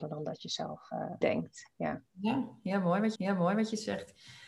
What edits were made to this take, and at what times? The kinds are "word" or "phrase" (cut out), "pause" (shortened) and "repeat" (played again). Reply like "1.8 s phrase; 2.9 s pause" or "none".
1.2 s word; 3.2 s repeat